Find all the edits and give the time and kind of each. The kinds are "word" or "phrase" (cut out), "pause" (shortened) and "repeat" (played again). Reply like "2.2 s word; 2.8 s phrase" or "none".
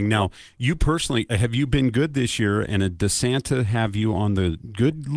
1.3 s word